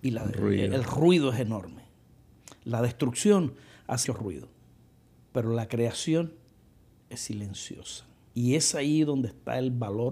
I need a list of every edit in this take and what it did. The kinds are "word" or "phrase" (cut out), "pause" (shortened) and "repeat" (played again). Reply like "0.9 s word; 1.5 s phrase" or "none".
4.0 s word